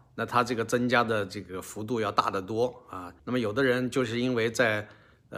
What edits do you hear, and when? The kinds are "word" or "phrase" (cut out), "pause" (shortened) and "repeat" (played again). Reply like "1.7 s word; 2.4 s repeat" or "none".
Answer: 3.2 s pause